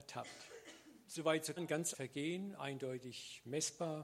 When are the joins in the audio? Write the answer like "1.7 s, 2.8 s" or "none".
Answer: 1.0 s, 1.6 s, 1.9 s